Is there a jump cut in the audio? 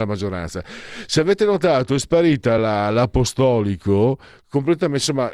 no; 0 cuts

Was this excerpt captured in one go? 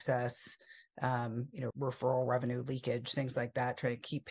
no; 1 cut; at 1.7 s

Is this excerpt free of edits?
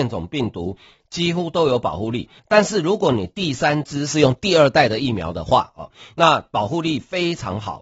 no; 1 cut; at 2.4 s

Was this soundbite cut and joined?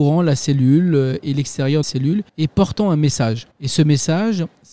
yes; 3 cuts; at 1.8 s, 2.3 s, 3.5 s

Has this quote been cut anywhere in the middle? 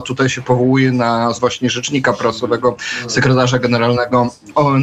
yes; 1 cut; at 1.3 s

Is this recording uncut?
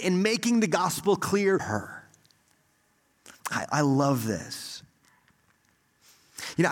no; 1 cut; at 1.6 s

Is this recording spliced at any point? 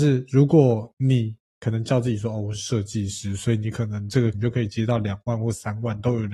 yes; 1 cut; at 4.3 s

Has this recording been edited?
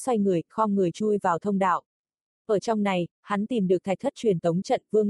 no; 0 cuts

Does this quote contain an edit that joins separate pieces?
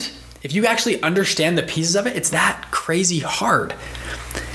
yes; 1 cut; at 2.3 s

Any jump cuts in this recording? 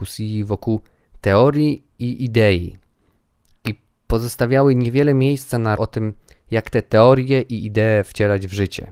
yes; 1 cut; at 5.8 s

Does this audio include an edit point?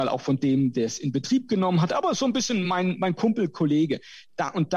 no; 0 cuts

